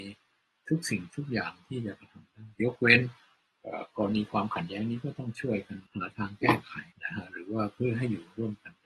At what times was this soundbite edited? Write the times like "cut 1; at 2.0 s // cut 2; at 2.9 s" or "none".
cut 1; at 2.5 s // cut 2; at 5.9 s // cut 3; at 6.9 s